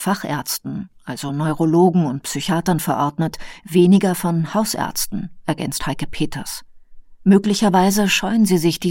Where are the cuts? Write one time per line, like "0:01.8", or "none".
none